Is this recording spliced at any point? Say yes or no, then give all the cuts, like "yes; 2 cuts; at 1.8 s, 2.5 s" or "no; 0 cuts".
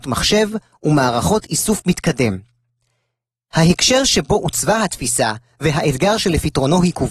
no; 0 cuts